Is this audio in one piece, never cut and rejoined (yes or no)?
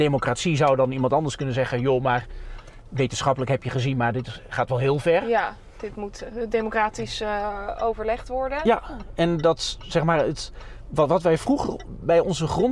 yes